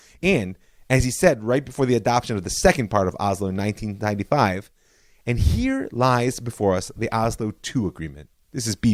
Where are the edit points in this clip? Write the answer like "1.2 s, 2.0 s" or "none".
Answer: none